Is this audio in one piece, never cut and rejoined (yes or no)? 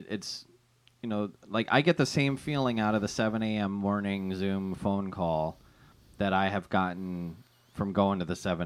yes